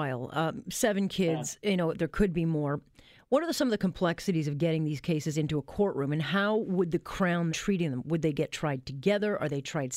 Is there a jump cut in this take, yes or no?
yes